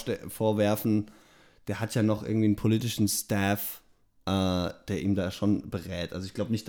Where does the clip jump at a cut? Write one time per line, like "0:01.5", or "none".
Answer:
none

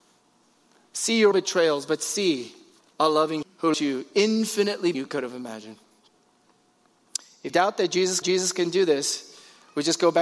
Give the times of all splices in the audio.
0:01.3
0:02.8
0:03.4
0:03.7
0:04.9
0:07.5
0:08.2

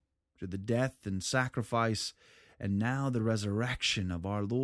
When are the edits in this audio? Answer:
none

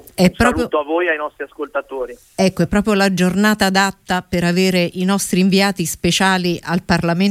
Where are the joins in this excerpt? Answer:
none

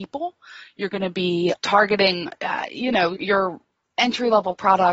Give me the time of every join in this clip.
0:01.6
0:03.2

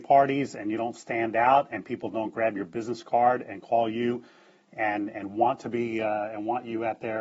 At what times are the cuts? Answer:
none

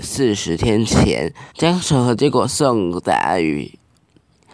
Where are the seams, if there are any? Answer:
0:01.5

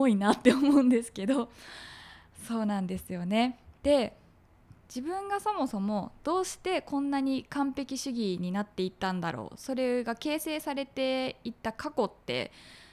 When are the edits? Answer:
0:03.8

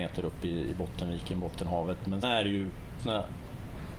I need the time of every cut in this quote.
0:02.2
0:03.0

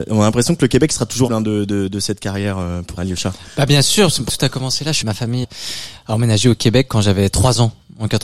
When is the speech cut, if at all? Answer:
0:01.3
0:03.0
0:04.3
0:05.0
0:05.4

